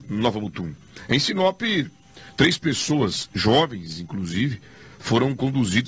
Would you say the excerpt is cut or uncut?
uncut